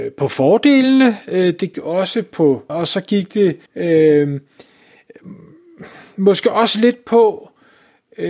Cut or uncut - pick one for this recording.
cut